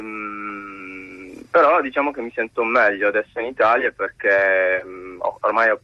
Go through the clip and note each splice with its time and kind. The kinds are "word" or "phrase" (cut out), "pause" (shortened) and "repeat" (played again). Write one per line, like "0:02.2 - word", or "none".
0:01.5 - pause